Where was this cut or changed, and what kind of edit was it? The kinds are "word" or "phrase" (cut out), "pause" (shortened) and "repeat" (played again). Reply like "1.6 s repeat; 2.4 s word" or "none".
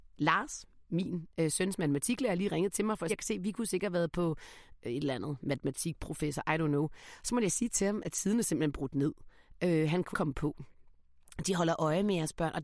3.1 s phrase; 10.1 s word